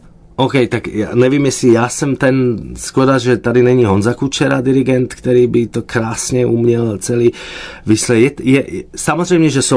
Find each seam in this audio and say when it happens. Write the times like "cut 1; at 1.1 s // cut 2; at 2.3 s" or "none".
none

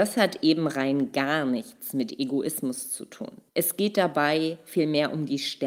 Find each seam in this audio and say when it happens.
cut 1; at 3.5 s

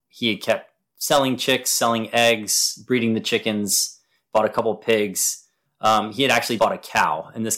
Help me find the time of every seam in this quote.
cut 1; at 6.6 s

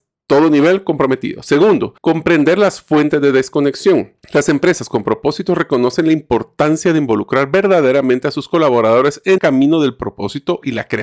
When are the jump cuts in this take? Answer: cut 1; at 2.0 s // cut 2; at 4.2 s // cut 3; at 9.4 s

